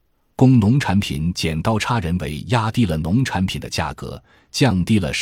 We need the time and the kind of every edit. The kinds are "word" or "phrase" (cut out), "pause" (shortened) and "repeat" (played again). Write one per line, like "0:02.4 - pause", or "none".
none